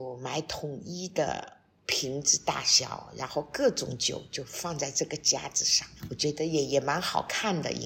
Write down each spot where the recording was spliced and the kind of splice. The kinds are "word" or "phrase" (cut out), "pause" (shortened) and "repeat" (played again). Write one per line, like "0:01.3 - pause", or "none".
0:06.0 - pause